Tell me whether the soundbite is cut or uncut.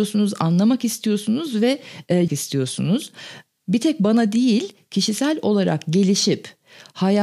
cut